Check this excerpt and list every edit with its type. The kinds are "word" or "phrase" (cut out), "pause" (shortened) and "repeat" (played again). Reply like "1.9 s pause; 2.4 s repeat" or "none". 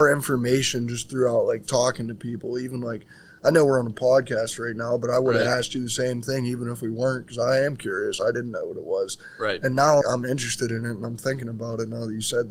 10.0 s word